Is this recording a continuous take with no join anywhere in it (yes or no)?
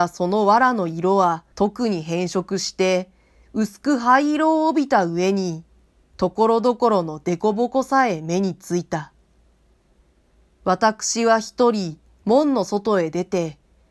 no